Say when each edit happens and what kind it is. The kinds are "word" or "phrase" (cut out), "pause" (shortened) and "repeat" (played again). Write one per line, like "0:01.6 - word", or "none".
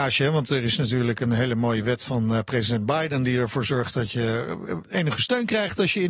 none